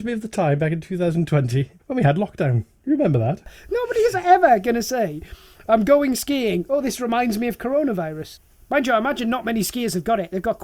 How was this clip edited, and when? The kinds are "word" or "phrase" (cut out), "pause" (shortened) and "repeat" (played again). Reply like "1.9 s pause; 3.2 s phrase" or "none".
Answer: 1.8 s pause